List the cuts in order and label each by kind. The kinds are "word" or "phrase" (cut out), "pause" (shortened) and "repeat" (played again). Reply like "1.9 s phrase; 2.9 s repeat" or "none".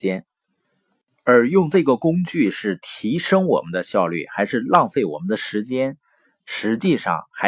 none

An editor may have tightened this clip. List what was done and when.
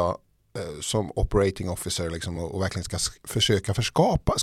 none

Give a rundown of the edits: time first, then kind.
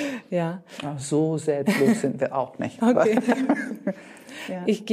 none

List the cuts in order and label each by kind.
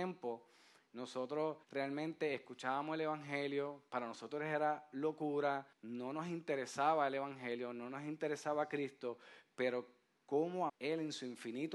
1.6 s pause; 5.7 s pause; 10.7 s word

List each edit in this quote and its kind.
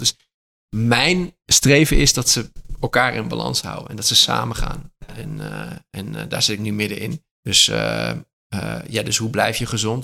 1.4 s pause; 7.3 s pause

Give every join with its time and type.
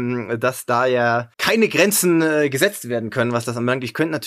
1.3 s pause

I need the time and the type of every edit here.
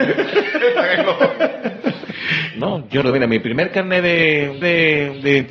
3.0 s word; 4.6 s repeat

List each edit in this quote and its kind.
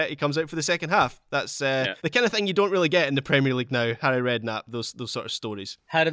2.0 s pause

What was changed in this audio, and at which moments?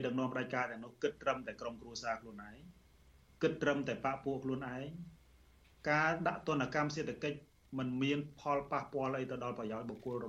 7.5 s pause

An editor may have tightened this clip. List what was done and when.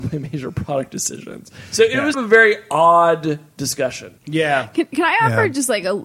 2.1 s phrase; 4.2 s pause

